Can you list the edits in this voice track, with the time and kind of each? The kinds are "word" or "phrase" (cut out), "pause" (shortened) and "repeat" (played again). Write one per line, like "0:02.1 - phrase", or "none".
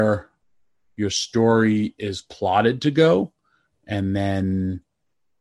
none